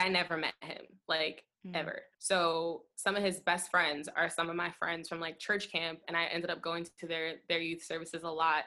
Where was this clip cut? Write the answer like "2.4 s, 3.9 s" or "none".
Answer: 2.1 s